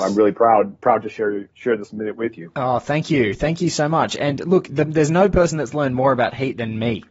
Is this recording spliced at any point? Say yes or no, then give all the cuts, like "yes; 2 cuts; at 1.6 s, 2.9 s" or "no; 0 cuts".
no; 0 cuts